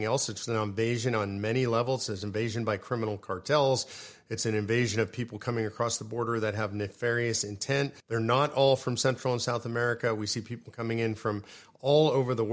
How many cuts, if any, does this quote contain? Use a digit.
1